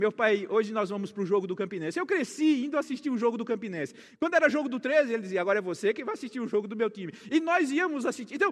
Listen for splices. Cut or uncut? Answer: uncut